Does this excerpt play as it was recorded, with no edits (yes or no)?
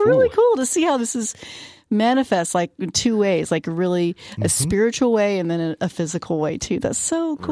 yes